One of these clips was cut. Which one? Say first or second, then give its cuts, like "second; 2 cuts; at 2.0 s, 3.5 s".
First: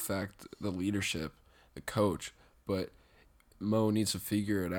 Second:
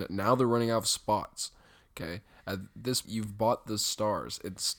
second; 1 cut; at 3.0 s